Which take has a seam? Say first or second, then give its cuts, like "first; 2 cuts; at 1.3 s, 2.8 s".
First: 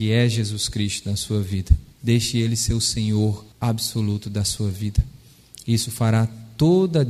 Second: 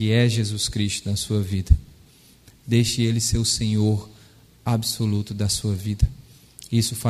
first; 2 cuts; at 1.9 s, 3.5 s